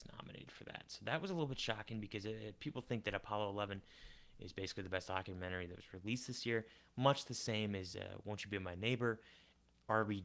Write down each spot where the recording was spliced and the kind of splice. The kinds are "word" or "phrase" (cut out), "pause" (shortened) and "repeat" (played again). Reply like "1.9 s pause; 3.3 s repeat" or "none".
none